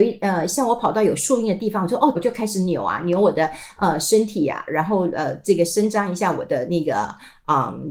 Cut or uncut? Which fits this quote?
cut